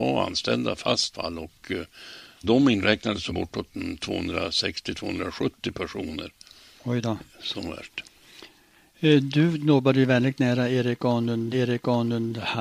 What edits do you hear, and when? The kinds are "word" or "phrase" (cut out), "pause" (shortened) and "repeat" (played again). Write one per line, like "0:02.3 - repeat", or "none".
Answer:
0:01.1 - phrase
0:02.4 - word
0:03.3 - phrase
0:11.5 - repeat